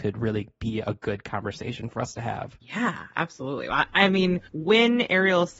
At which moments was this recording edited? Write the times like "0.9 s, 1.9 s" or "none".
2.6 s, 4.5 s